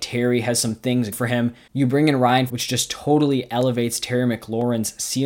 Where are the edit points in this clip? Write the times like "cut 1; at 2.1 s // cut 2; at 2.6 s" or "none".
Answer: cut 1; at 1.1 s // cut 2; at 2.5 s